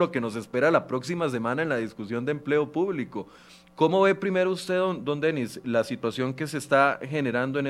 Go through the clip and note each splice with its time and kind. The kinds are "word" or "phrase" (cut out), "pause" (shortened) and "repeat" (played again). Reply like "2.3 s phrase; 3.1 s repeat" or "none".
none